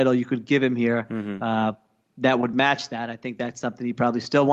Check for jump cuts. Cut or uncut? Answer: uncut